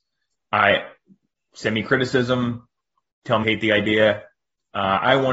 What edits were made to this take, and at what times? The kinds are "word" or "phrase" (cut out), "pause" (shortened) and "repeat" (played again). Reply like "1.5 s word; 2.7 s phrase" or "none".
3.4 s word